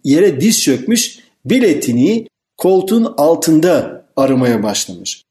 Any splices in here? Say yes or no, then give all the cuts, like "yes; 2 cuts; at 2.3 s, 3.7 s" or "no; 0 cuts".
no; 0 cuts